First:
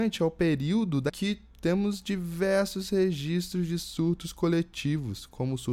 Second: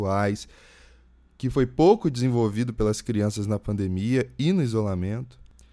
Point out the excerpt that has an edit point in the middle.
first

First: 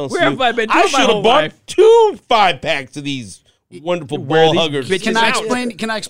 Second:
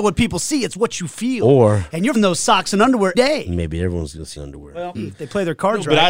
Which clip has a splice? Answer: second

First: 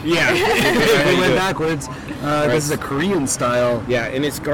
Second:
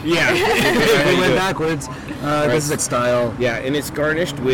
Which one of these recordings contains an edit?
second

